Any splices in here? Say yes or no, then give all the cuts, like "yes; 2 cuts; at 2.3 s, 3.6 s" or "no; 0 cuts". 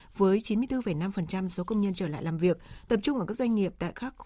no; 0 cuts